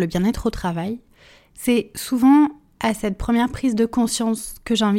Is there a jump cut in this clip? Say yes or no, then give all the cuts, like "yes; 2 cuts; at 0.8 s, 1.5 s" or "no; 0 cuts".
no; 0 cuts